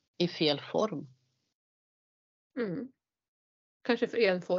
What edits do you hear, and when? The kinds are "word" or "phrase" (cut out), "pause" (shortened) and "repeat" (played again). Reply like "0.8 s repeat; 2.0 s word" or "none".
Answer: none